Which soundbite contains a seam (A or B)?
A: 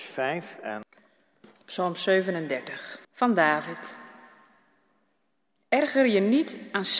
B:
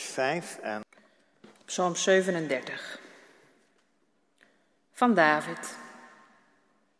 A